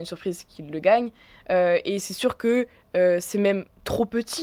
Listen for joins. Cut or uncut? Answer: uncut